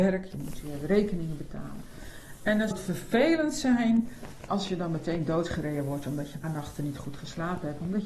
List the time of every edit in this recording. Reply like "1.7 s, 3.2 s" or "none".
2.7 s, 4.5 s, 6.4 s